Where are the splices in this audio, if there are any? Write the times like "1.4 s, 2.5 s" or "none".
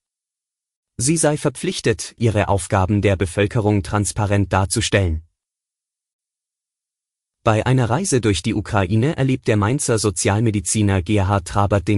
2.2 s